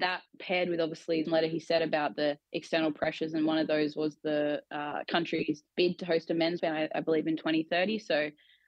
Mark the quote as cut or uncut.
cut